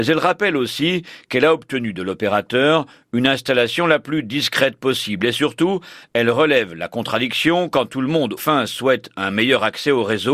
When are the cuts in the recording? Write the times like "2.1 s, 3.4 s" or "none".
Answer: 8.4 s